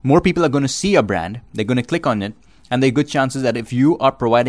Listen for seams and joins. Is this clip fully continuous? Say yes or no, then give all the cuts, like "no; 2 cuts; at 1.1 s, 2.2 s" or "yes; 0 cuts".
yes; 0 cuts